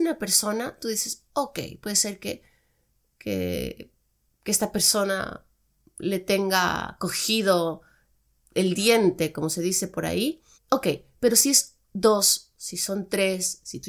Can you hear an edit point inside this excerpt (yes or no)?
yes